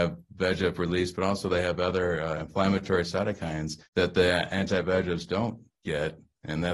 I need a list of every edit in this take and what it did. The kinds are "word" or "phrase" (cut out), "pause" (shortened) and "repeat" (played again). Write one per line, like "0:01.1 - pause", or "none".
0:03.9 - pause